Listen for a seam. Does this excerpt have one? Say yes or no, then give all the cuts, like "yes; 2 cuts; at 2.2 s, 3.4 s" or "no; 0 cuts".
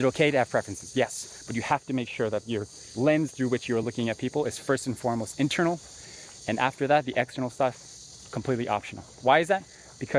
no; 0 cuts